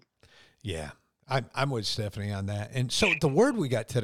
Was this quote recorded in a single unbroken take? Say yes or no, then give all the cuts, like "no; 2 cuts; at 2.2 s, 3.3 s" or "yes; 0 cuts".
yes; 0 cuts